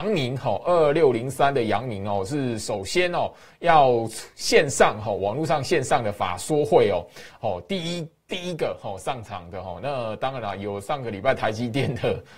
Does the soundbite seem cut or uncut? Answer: uncut